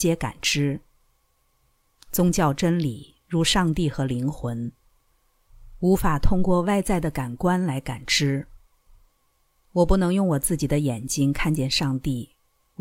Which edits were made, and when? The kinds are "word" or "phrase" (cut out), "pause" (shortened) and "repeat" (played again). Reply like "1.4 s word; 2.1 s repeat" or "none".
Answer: none